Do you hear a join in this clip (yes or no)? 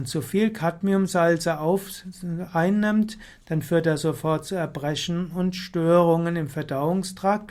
no